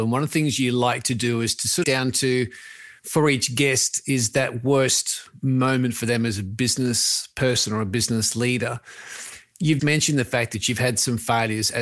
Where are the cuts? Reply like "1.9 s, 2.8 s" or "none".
1.8 s, 9.8 s